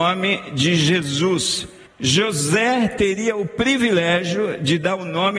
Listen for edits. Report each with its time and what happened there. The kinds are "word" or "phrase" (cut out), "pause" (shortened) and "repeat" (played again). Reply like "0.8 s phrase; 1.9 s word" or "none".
1.9 s pause